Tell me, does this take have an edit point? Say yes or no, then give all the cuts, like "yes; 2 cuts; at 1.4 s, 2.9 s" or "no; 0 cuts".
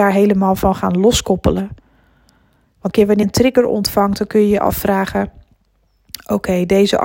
yes; 2 cuts; at 2.9 s, 3.2 s